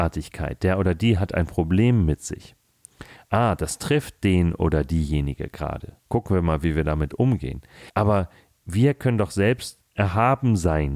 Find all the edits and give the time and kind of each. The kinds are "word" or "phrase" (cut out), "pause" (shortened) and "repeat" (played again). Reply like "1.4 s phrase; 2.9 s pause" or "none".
6.0 s pause; 7.9 s pause